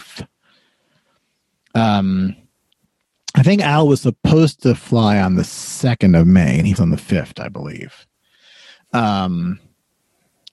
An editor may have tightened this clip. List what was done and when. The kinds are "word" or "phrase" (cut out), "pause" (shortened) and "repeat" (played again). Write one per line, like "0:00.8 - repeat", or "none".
0:06.8 - word